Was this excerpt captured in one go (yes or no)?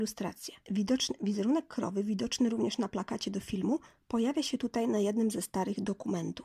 yes